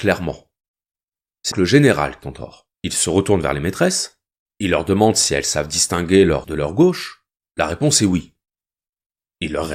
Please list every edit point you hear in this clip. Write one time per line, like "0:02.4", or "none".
0:01.5
0:02.2
0:02.7
0:04.4
0:06.4
0:07.4